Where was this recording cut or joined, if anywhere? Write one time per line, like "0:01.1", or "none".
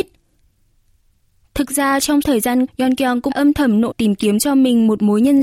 0:02.2
0:02.7
0:03.3
0:03.9